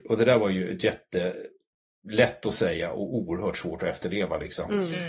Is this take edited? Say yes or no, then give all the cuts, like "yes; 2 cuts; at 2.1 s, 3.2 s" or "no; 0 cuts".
no; 0 cuts